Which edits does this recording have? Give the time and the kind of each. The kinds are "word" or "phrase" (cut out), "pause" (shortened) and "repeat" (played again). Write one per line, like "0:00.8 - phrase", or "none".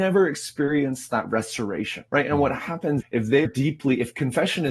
0:02.1 - pause
0:03.0 - word
0:03.5 - word